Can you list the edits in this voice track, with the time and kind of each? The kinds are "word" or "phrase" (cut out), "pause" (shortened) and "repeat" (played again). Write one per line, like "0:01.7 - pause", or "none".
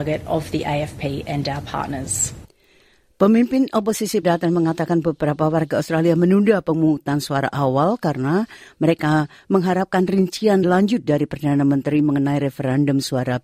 0:04.2 - word
0:10.6 - word